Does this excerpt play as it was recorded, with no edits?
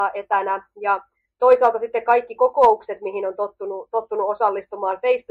yes; 0 cuts

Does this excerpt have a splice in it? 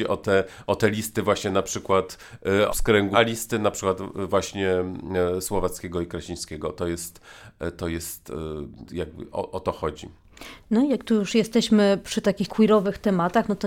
yes; 4 cuts; at 2.7 s, 3.1 s, 8.8 s, 12.5 s

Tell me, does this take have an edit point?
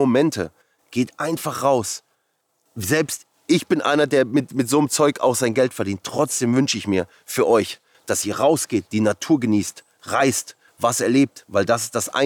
no; 0 cuts

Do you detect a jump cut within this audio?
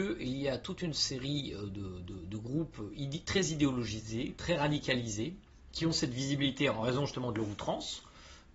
no; 0 cuts

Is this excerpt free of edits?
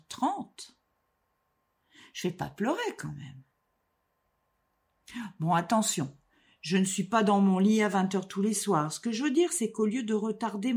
yes; 0 cuts

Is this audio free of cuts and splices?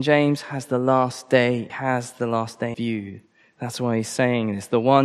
no; 2 cuts; at 1.7 s, 2.7 s

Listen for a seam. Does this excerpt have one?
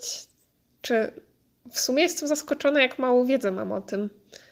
no; 0 cuts

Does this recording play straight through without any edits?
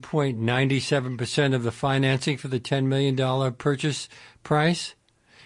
yes; 0 cuts

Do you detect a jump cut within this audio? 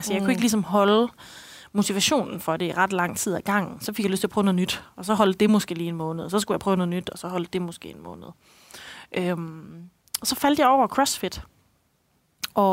no; 0 cuts

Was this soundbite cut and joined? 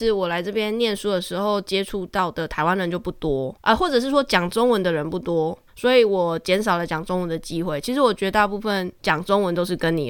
yes; 3 cuts; at 3.6 s, 5.7 s, 9.0 s

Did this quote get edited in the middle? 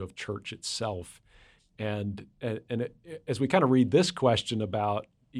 no; 0 cuts

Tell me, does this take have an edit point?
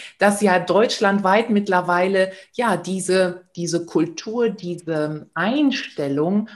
no; 0 cuts

